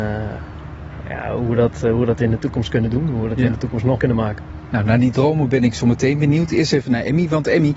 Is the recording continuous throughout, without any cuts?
no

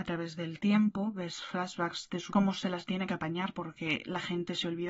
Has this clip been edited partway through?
yes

